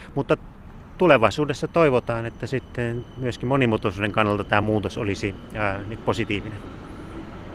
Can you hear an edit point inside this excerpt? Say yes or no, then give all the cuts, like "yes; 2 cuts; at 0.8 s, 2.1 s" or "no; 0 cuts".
no; 0 cuts